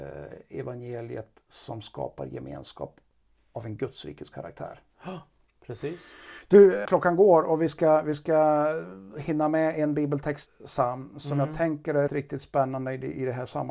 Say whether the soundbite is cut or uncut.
cut